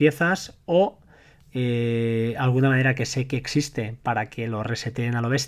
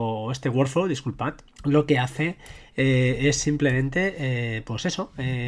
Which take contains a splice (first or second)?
second